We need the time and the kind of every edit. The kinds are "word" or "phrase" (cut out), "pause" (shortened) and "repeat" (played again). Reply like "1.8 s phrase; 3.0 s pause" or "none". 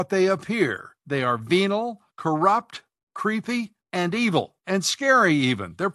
1.0 s pause; 2.1 s pause; 3.8 s pause; 4.6 s pause